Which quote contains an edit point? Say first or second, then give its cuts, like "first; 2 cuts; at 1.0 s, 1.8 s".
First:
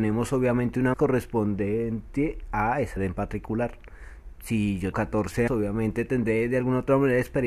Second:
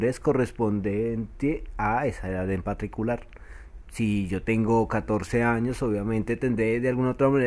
first; 4 cuts; at 0.9 s, 3.0 s, 4.9 s, 5.5 s